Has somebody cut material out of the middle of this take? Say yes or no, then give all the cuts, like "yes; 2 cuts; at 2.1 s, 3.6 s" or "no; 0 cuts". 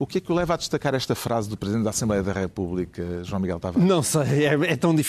no; 0 cuts